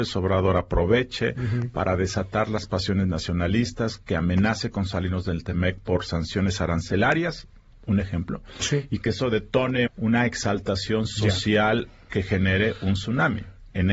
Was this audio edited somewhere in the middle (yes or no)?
yes